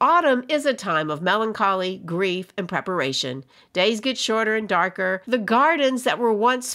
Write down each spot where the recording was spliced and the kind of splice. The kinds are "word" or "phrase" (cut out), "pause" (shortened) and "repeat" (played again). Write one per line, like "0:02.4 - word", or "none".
none